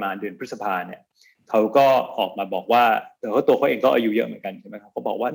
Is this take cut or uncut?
uncut